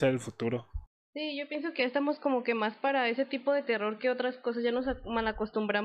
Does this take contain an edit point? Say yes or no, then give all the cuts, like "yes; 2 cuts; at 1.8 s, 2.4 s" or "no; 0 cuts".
no; 0 cuts